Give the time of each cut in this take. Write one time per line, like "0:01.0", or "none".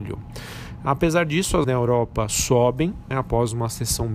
0:01.6
0:03.1